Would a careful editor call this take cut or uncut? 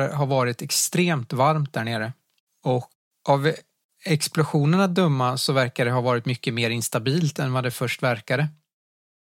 uncut